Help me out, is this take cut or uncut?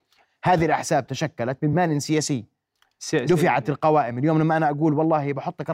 uncut